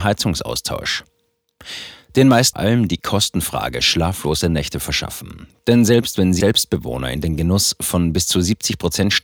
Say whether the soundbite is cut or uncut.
cut